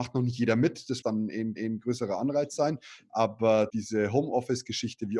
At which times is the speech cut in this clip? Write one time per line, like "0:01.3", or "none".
0:01.0
0:01.6
0:03.7